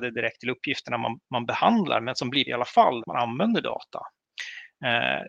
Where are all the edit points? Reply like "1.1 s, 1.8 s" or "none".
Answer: 1.2 s, 2.5 s, 3.0 s